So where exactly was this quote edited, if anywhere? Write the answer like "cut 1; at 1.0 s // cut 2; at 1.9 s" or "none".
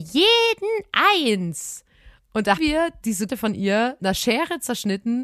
cut 1; at 2.6 s // cut 2; at 3.3 s // cut 3; at 4.0 s